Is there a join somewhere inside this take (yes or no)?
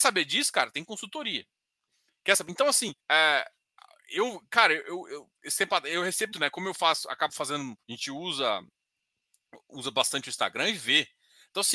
yes